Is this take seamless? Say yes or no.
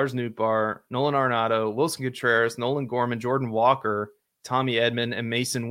yes